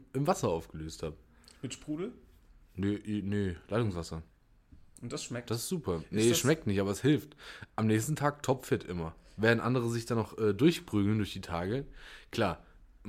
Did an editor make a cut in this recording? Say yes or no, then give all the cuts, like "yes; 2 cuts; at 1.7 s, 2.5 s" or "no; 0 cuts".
no; 0 cuts